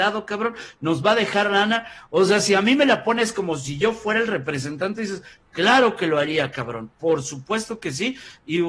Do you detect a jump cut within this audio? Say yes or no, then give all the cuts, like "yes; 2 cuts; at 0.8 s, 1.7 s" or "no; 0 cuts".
no; 0 cuts